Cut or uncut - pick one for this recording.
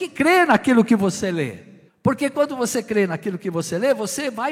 cut